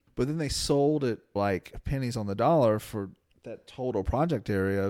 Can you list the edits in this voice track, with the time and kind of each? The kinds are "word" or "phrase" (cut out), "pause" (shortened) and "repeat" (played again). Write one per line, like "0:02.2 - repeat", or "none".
0:01.4 - phrase
0:03.3 - pause